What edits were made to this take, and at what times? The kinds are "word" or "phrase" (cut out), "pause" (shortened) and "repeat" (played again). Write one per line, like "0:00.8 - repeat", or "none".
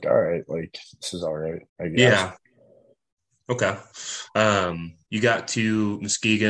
0:01.7 - pause
0:05.1 - word